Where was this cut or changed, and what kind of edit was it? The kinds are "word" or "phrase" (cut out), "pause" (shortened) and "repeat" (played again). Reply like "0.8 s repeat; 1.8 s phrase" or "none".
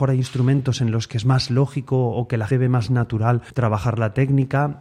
2.5 s word; 3.5 s pause